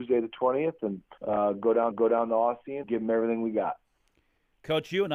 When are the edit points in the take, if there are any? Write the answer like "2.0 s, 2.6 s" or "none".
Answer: 1.2 s, 1.9 s, 2.8 s

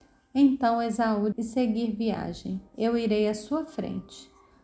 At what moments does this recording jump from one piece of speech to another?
1.3 s

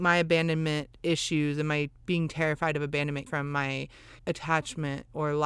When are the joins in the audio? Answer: 1.9 s, 3.3 s, 4.2 s

